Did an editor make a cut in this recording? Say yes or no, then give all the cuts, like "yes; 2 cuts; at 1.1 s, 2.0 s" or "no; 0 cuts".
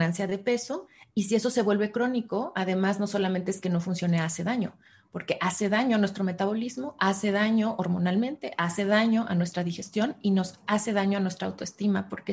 no; 0 cuts